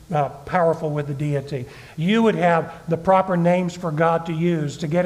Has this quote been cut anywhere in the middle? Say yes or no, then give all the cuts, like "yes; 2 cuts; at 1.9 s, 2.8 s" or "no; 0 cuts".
no; 0 cuts